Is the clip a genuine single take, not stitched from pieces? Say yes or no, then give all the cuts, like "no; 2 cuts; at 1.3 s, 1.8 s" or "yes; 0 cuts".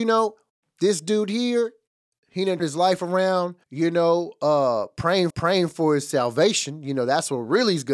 no; 4 cuts; at 2.0 s, 2.6 s, 3.6 s, 5.3 s